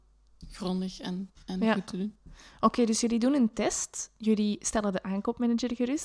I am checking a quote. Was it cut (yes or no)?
no